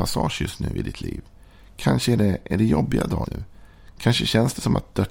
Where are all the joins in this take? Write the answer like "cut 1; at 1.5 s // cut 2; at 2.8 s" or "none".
cut 1; at 3.2 s